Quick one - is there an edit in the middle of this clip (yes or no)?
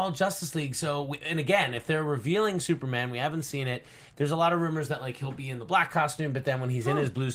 no